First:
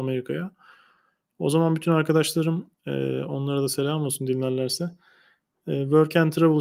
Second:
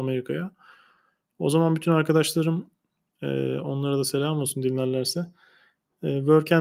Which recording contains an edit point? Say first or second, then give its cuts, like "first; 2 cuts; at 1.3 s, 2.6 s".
first; 1 cut; at 2.7 s